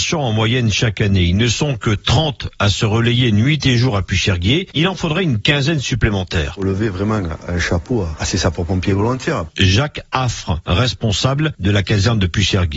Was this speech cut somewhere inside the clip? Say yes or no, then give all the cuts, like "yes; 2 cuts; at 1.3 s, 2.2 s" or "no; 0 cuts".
no; 0 cuts